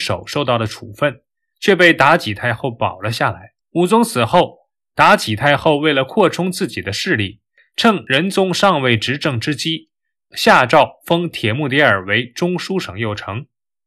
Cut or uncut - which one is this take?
cut